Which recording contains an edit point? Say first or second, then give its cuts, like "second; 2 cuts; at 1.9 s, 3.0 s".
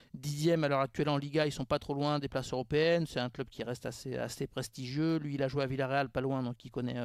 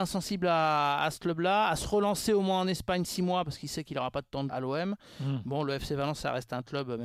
second; 1 cut; at 4.5 s